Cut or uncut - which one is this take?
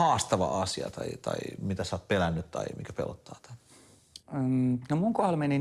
cut